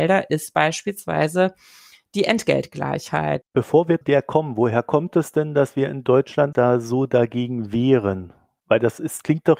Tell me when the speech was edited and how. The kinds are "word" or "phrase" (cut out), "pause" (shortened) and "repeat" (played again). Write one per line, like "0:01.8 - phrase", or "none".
0:04.0 - word
0:06.5 - word